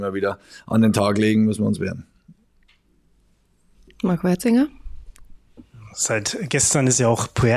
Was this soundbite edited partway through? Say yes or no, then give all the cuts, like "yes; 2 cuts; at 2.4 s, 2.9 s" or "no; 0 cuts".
no; 0 cuts